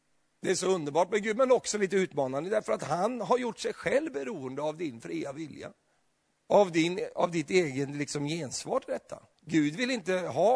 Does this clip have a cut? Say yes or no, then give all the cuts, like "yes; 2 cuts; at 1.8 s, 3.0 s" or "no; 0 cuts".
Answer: yes; 2 cuts; at 6.0 s, 9.3 s